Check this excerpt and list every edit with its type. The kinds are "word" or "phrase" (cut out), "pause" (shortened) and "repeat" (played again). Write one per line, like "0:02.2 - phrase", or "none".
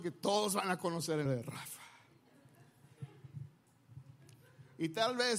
0:01.3 - word